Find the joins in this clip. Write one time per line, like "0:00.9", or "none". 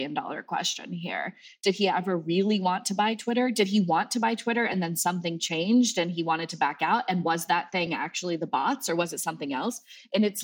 none